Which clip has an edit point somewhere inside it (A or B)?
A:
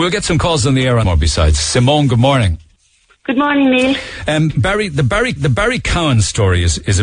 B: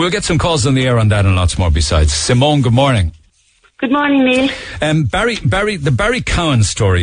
A